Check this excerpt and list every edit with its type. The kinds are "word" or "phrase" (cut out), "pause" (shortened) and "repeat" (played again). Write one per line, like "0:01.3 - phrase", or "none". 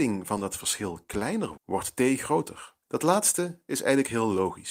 0:01.6 - word
0:02.8 - pause